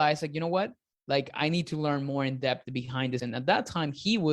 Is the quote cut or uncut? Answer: cut